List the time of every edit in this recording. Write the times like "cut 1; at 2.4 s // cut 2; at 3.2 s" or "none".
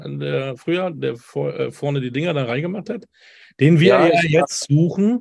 none